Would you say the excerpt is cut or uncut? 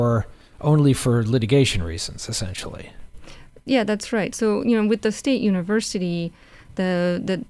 uncut